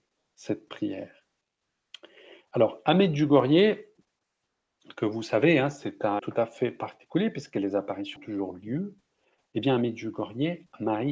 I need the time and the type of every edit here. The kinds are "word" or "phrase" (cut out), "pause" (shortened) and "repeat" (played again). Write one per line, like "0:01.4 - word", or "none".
0:06.2 - word
0:08.2 - word